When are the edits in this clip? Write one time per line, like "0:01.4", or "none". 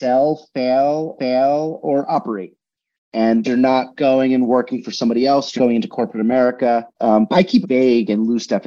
0:01.2
0:03.4
0:05.6
0:06.9
0:07.3
0:07.6